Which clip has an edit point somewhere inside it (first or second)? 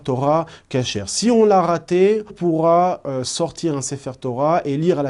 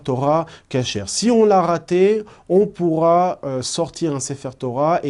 first